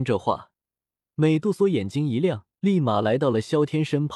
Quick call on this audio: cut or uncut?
cut